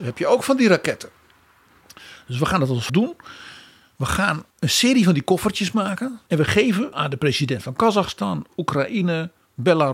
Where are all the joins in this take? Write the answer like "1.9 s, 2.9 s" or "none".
2.9 s, 4.5 s, 6.3 s, 6.9 s